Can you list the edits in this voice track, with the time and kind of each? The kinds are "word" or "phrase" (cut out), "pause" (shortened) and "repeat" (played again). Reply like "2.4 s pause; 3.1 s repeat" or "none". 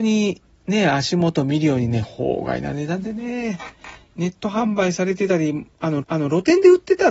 6.0 s repeat